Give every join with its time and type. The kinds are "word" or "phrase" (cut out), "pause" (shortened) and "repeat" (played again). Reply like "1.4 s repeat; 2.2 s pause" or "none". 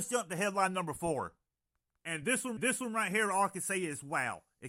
2.6 s repeat